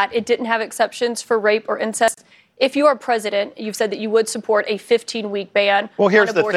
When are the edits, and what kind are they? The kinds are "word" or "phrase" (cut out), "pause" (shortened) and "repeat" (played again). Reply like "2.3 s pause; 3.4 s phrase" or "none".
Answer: none